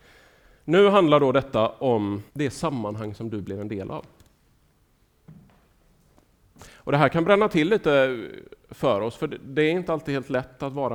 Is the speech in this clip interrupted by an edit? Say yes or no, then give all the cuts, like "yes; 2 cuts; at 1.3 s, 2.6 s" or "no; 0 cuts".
yes; 1 cut; at 2.3 s